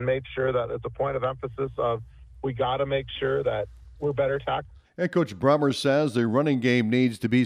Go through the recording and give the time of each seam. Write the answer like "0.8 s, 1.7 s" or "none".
4.8 s

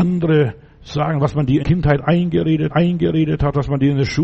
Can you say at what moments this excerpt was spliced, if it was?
1.6 s, 2.7 s

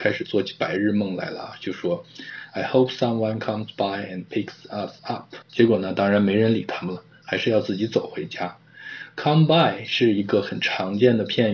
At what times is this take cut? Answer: 5.4 s

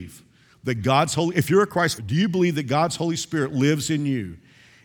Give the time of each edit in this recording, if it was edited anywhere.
2.0 s

